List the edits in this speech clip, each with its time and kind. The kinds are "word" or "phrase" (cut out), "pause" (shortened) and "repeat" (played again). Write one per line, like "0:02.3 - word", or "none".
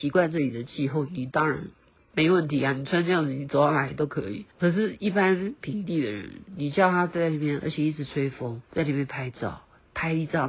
0:02.0 - pause
0:04.5 - pause
0:08.6 - pause